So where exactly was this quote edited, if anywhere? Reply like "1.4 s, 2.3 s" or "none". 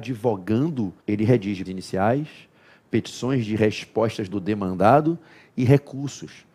1.0 s, 1.7 s, 4.3 s